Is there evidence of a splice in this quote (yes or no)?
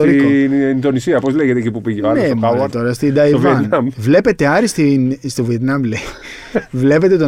no